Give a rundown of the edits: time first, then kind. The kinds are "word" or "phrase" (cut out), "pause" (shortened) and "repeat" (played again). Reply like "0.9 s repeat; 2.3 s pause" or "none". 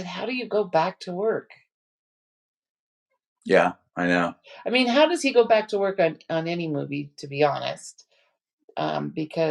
none